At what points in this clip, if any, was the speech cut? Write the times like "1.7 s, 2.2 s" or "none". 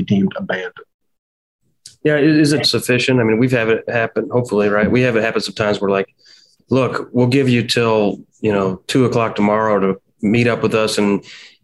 2.6 s, 8.8 s